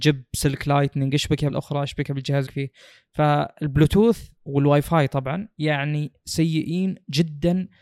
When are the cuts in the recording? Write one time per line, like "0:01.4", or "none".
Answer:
0:01.5
0:02.5
0:04.4
0:05.5